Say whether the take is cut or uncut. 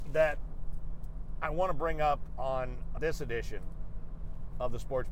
cut